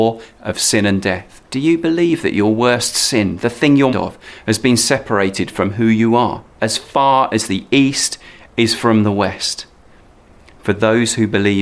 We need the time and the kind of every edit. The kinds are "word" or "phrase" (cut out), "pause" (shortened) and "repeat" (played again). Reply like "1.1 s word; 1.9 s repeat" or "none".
1.4 s pause; 3.9 s phrase; 6.5 s pause